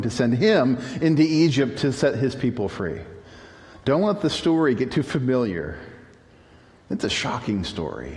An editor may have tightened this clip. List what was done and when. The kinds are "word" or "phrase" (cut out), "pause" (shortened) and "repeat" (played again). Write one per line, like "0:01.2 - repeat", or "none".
none